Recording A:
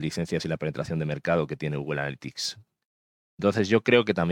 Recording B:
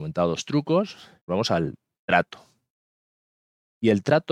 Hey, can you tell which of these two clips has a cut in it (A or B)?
B